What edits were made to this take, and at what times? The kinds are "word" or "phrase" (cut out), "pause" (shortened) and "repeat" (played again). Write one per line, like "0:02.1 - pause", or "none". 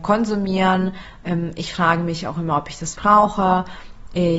0:02.9 - word